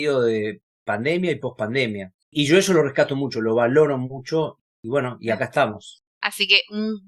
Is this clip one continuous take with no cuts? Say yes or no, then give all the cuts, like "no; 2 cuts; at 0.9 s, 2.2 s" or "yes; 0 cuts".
yes; 0 cuts